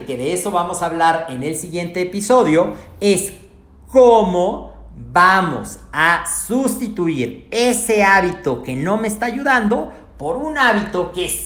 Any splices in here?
no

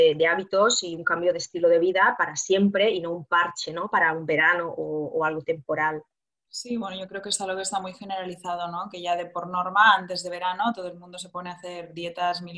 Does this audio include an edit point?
no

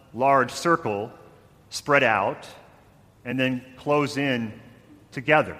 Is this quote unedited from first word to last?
yes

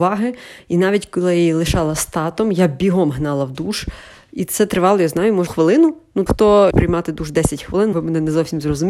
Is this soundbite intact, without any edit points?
no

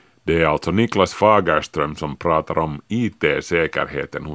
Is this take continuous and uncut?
yes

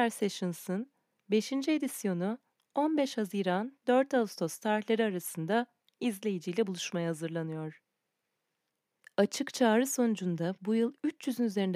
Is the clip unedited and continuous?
yes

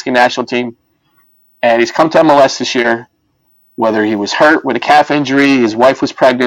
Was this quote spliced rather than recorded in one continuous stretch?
no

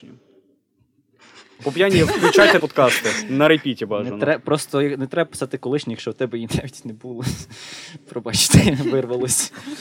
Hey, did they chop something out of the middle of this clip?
yes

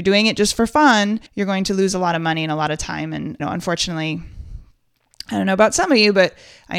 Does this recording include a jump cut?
yes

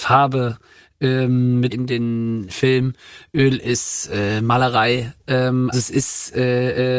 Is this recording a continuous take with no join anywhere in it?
no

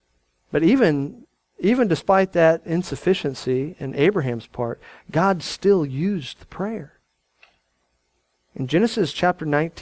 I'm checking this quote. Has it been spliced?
no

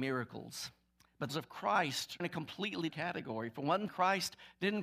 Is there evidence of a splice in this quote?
yes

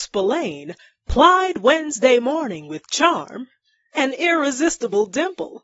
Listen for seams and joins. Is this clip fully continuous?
yes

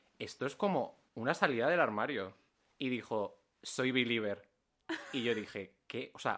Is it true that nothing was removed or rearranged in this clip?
yes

